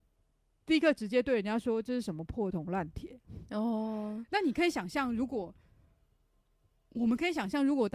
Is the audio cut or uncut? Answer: uncut